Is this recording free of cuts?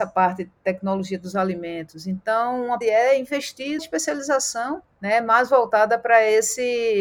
no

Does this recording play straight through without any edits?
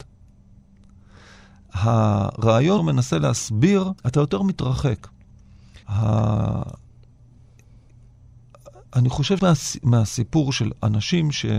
no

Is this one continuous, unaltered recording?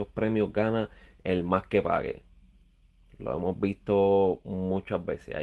yes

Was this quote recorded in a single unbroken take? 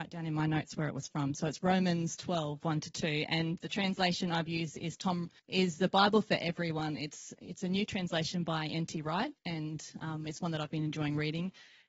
no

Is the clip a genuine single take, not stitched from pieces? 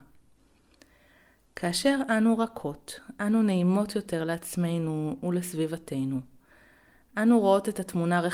yes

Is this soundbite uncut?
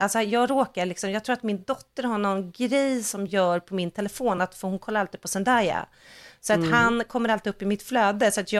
yes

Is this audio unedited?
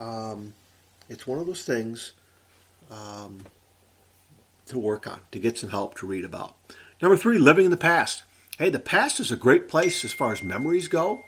yes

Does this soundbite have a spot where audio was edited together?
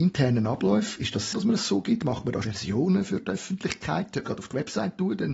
yes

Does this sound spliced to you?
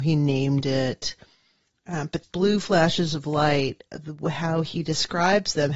yes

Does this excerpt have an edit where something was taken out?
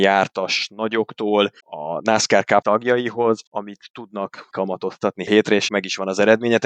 yes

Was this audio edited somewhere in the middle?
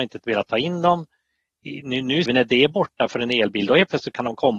yes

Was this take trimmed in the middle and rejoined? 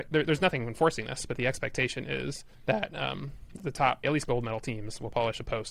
yes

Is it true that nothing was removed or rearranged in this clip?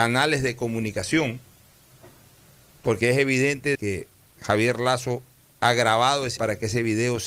no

